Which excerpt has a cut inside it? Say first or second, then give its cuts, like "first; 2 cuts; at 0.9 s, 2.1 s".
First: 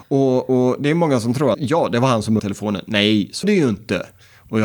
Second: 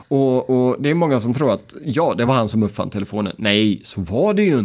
first; 3 cuts; at 1.5 s, 2.4 s, 3.4 s